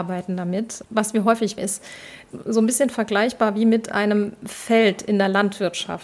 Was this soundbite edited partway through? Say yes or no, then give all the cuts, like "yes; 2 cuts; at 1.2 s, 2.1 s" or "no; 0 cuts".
yes; 1 cut; at 1.6 s